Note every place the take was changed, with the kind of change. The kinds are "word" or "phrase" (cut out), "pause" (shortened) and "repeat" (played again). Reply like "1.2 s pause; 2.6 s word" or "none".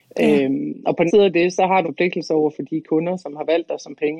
1.1 s word; 1.8 s word